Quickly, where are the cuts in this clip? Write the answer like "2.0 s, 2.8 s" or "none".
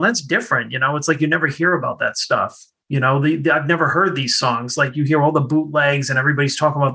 none